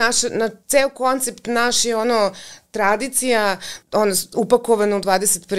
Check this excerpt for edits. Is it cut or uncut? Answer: cut